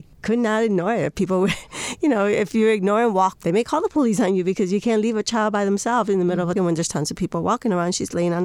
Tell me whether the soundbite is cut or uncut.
cut